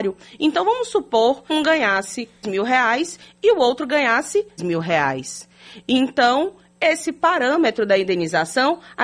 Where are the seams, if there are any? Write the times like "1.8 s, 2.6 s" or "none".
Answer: 1.5 s, 2.4 s, 4.6 s